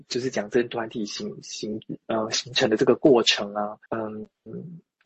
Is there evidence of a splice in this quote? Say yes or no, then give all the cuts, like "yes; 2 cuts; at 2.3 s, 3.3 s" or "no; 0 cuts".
yes; 1 cut; at 3.9 s